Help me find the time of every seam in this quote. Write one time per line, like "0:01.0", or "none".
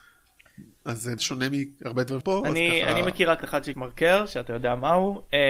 0:01.2
0:02.2
0:03.4
0:03.7